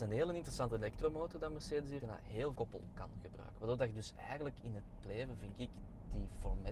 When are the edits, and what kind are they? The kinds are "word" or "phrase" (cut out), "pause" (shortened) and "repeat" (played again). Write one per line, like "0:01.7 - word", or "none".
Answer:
0:02.0 - word
0:02.5 - word
0:05.0 - word